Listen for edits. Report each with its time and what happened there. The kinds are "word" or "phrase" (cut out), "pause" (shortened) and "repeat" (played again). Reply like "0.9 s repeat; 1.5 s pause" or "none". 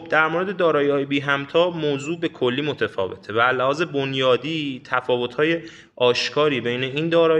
none